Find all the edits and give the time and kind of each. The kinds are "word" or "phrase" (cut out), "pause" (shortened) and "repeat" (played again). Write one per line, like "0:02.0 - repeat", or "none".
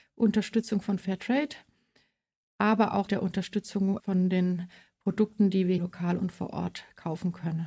0:03.1 - word
0:04.0 - word
0:05.8 - word